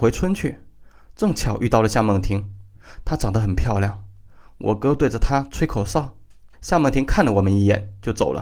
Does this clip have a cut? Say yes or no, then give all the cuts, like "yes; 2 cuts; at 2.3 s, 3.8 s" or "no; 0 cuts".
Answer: yes; 1 cut; at 6.5 s